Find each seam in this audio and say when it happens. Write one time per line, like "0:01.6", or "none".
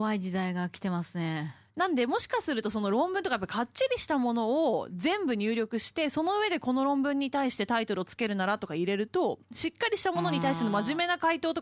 0:01.7